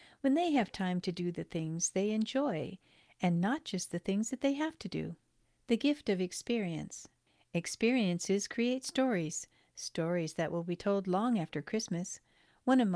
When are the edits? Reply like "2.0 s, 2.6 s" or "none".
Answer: none